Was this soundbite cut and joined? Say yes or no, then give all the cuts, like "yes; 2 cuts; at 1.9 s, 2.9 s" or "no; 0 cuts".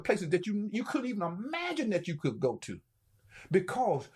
no; 0 cuts